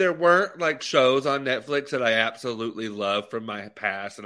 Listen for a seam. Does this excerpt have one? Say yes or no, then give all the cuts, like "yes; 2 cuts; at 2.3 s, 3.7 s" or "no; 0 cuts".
no; 0 cuts